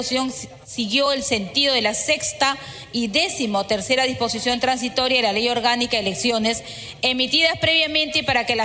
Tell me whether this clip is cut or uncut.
uncut